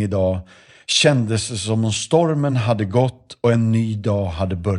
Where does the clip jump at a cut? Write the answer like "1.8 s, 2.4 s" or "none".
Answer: none